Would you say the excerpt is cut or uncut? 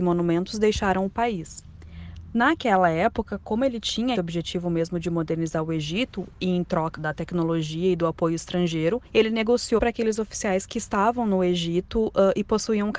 cut